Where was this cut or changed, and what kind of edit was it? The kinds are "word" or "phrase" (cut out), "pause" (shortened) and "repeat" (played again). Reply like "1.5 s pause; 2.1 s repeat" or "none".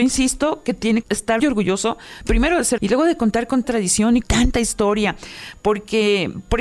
1.0 s word; 1.4 s word; 2.8 s word; 3.6 s word; 4.2 s word